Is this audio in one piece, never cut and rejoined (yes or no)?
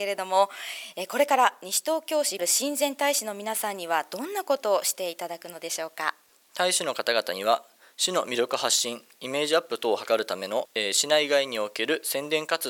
no